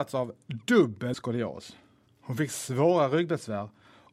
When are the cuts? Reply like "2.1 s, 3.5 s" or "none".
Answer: 1.1 s